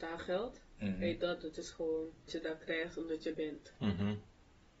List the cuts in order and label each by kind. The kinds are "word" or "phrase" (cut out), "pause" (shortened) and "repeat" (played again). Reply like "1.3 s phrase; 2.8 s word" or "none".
2.3 s word; 3.3 s word